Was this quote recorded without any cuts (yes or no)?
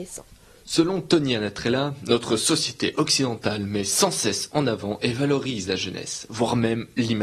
yes